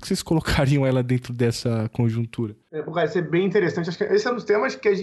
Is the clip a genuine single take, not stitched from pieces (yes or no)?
yes